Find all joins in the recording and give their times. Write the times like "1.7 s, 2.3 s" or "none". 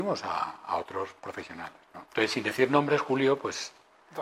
2.1 s

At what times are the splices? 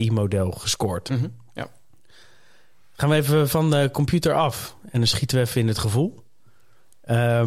none

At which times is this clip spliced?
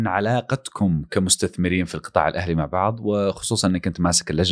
none

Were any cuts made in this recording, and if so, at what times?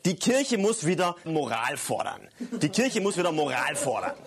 1.3 s

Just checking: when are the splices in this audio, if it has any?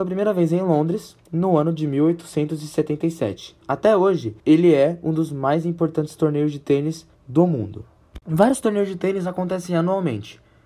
3.6 s, 4.4 s, 7.1 s, 8.2 s

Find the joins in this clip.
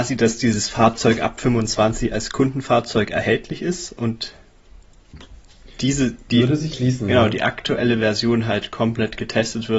6.7 s

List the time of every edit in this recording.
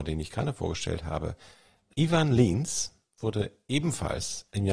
none

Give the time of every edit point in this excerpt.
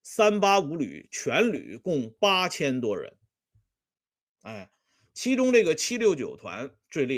none

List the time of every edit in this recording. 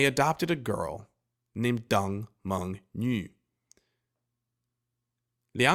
none

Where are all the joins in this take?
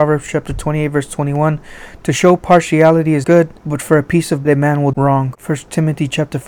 3.2 s, 3.6 s, 4.4 s, 4.9 s

